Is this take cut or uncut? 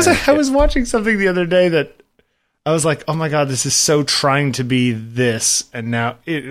uncut